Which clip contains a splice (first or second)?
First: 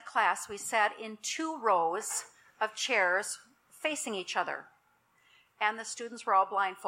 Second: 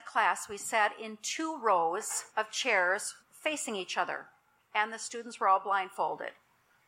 second